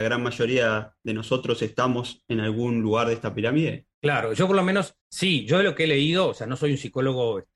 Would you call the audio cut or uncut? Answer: cut